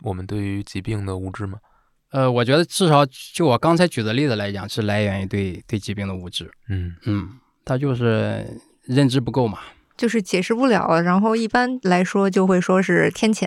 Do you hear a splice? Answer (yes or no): no